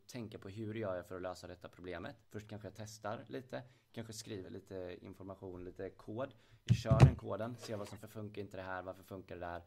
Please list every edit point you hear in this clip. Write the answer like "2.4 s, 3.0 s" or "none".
2.2 s, 4.4 s, 8.0 s